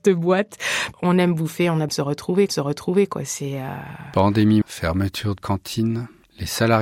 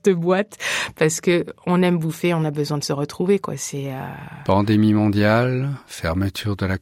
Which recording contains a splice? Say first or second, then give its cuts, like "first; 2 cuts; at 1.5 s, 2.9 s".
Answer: first; 5 cuts; at 0.9 s, 1.9 s, 2.5 s, 4.6 s, 5.4 s